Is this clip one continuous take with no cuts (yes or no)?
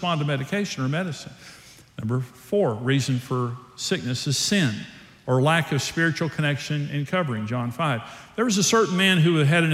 yes